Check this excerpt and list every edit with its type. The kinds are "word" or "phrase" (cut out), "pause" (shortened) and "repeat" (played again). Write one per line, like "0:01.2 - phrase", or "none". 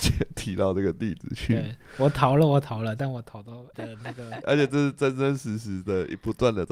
0:03.7 - word
0:04.4 - word